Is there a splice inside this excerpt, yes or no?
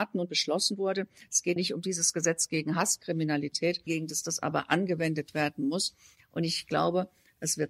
yes